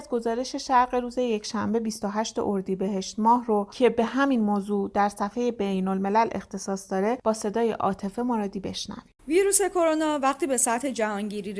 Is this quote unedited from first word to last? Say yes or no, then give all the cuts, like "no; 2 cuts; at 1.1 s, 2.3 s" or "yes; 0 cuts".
no; 1 cut; at 9.2 s